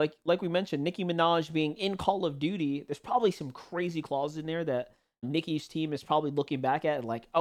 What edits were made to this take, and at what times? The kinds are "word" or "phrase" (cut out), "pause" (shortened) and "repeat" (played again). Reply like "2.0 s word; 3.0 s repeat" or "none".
5.2 s word

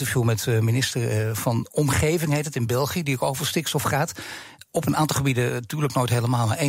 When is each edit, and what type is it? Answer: none

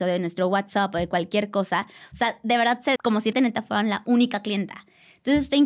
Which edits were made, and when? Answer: 3.0 s phrase; 3.3 s word

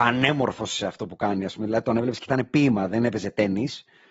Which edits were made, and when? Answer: none

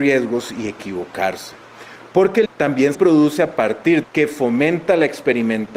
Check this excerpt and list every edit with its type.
2.5 s word; 2.9 s word; 4.0 s phrase

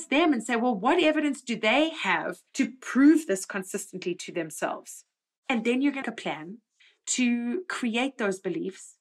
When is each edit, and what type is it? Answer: 2.5 s pause; 6.0 s word; 6.8 s pause

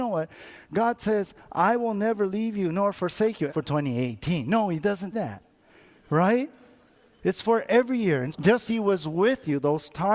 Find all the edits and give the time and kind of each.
3.5 s word; 5.1 s word; 8.3 s word; 8.7 s word

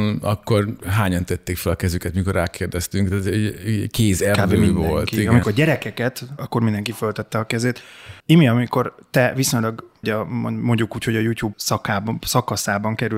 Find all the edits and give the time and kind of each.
5.4 s word; 6.4 s word; 8.2 s pause; 10.0 s phrase; 11.5 s word

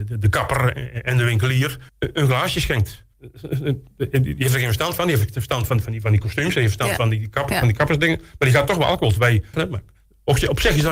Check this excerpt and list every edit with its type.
1.9 s pause; 3.1 s pause; 9.5 s phrase

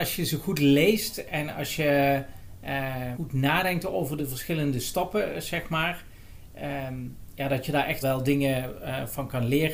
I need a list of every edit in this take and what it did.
3.1 s word; 4.2 s word; 8.0 s word

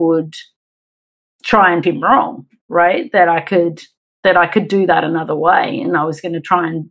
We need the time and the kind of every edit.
1.8 s word

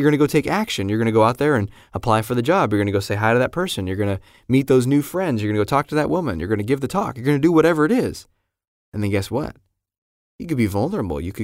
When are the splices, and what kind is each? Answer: none

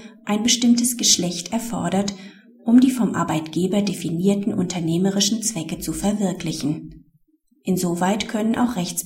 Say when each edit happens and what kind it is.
none

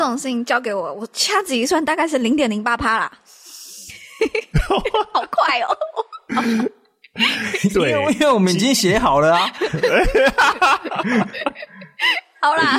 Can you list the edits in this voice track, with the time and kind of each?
none

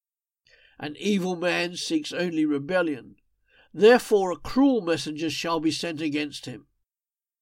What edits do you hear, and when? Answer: none

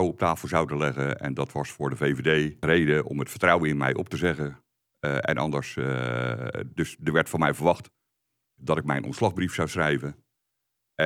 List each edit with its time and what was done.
none

